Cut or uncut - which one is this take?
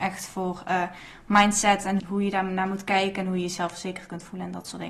cut